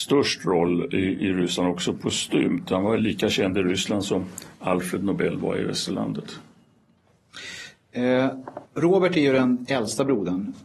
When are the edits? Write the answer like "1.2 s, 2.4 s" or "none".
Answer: 4.5 s, 8.6 s